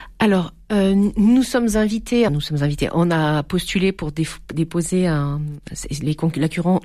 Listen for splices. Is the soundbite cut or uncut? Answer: cut